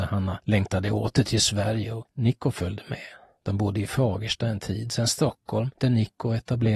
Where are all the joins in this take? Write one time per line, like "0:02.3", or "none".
none